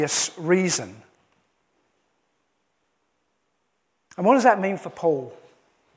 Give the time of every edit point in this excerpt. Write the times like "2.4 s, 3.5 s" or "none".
none